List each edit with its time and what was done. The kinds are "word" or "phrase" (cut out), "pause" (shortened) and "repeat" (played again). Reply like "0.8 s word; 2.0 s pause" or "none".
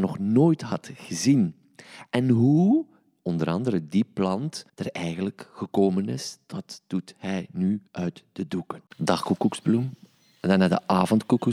4.7 s pause; 7.9 s pause; 8.9 s pause